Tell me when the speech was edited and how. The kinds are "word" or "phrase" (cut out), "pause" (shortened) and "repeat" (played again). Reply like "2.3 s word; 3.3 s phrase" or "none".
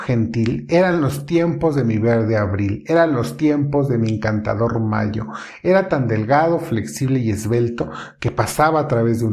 none